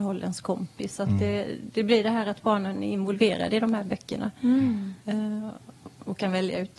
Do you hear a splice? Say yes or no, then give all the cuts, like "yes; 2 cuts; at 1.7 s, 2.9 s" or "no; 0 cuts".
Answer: no; 0 cuts